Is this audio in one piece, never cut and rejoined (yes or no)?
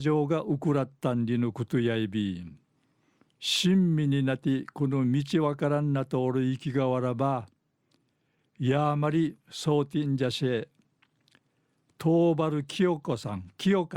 no